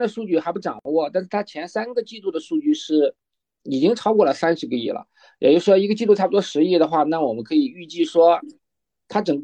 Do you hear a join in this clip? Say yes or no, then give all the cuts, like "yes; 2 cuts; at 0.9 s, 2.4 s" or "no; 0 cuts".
no; 0 cuts